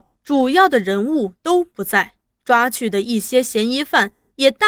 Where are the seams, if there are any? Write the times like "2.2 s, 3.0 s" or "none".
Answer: none

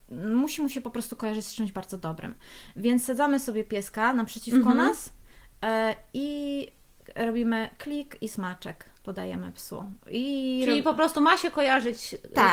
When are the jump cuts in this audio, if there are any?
none

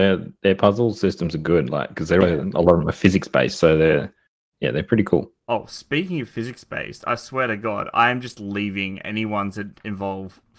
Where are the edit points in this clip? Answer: 2.2 s

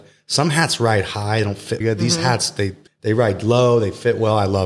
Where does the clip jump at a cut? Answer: 1.8 s, 2.9 s

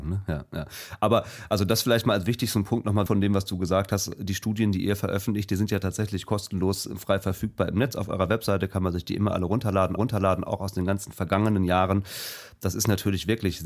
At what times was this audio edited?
3.1 s, 10.0 s

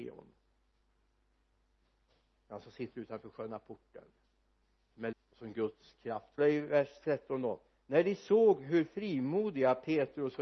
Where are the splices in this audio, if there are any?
5.1 s, 6.4 s

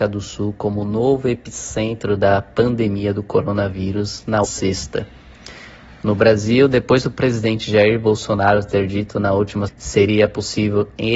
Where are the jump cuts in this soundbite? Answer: 4.4 s, 9.7 s

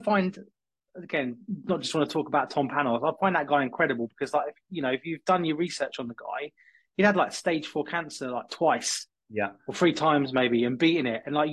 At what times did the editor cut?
none

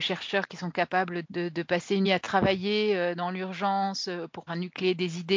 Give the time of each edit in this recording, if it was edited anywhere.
1.2 s, 2.0 s, 4.5 s

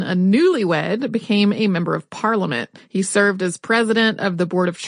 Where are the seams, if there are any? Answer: 2.8 s

